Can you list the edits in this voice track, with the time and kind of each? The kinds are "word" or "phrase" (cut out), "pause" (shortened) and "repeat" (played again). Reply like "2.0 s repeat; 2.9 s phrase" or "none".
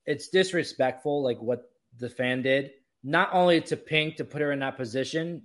2.9 s pause